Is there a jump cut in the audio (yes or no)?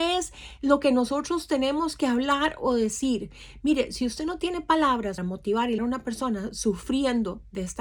yes